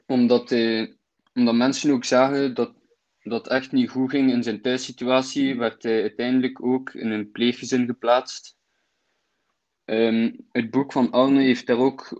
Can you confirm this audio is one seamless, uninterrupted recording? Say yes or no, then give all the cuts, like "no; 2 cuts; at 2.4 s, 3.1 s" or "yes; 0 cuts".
yes; 0 cuts